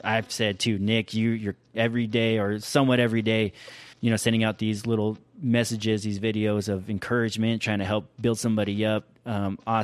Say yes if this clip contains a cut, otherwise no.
yes